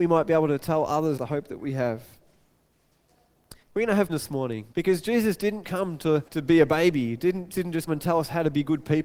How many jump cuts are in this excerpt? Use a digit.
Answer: 8